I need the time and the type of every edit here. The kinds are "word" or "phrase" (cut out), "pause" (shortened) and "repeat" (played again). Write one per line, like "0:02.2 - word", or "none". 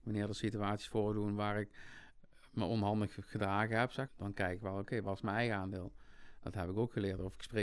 0:04.1 - phrase